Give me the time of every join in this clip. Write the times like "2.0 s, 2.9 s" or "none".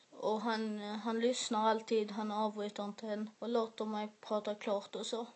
3.3 s